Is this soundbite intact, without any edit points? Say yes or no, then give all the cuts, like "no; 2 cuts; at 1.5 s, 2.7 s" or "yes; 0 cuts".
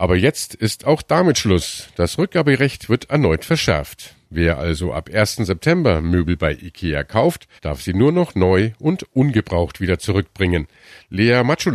no; 1 cut; at 7.6 s